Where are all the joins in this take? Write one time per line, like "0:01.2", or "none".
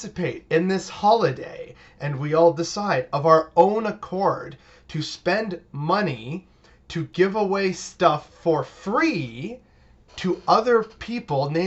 none